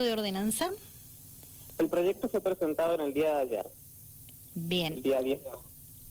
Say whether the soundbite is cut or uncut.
uncut